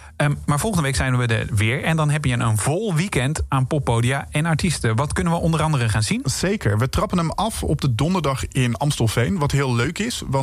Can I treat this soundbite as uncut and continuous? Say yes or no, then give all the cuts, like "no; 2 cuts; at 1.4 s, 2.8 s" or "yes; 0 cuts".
yes; 0 cuts